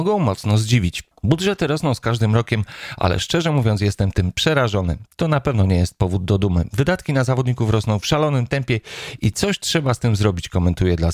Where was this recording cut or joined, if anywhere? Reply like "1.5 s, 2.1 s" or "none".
1.1 s